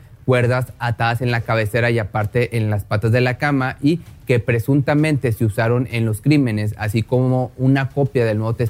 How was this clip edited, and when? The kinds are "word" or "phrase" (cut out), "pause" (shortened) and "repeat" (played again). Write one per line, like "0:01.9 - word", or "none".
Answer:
none

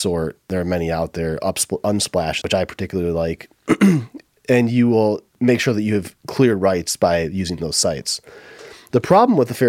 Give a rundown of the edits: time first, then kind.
0:02.4 - phrase
0:05.3 - pause

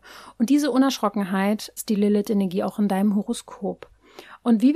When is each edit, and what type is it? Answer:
0:01.8 - word

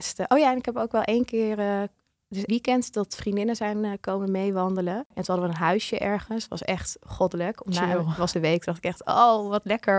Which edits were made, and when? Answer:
0:02.5 - word
0:08.3 - phrase

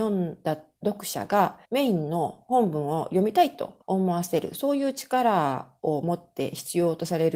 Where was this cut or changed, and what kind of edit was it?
0:01.7 - pause
0:03.8 - pause

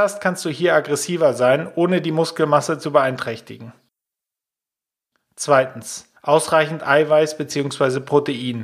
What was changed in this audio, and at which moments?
0:06.2 - pause

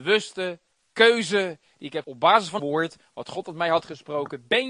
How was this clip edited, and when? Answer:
0:02.0 - word
0:02.6 - word

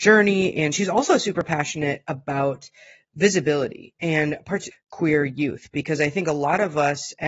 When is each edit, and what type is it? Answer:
0:04.7 - phrase

